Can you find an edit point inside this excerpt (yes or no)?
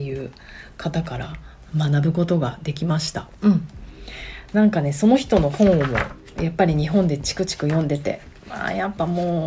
yes